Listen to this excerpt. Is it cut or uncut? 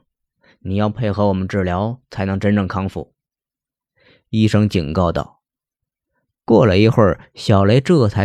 uncut